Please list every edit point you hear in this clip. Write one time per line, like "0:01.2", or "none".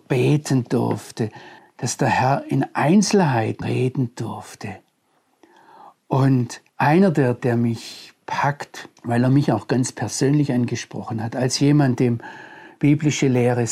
0:01.6
0:03.6
0:06.7
0:07.4
0:09.0